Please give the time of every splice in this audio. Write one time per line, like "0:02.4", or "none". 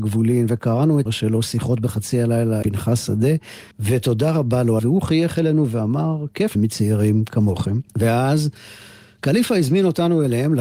0:01.1
0:02.6
0:03.7
0:04.8
0:06.5
0:07.9